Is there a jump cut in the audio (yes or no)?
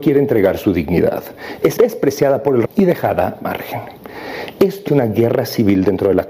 yes